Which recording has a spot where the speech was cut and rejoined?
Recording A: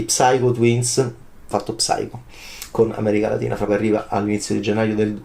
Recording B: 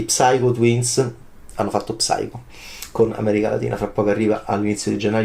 A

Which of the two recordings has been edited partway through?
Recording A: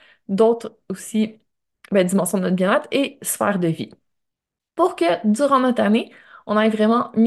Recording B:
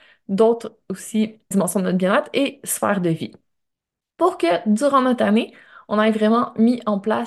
B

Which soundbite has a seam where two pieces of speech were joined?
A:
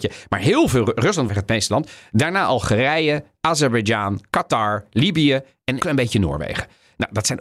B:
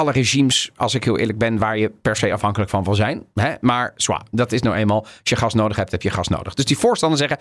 A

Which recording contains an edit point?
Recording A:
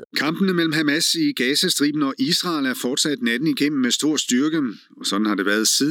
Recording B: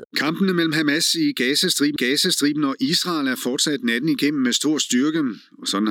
B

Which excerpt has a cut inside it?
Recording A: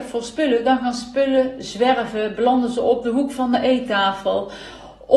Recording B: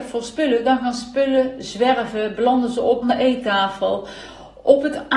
B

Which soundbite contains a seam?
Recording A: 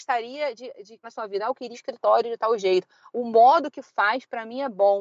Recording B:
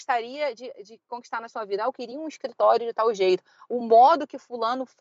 A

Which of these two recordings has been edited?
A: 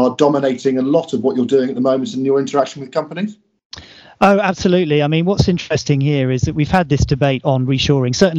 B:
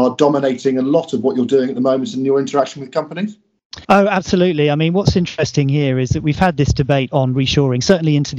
B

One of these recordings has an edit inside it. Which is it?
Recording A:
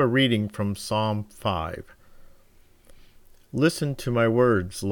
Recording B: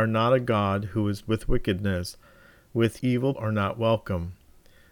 B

